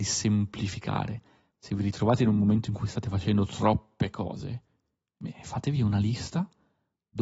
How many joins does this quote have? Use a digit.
0